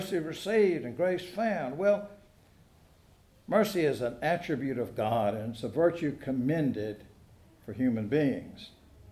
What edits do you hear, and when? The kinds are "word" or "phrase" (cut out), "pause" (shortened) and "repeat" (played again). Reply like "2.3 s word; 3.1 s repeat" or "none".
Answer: none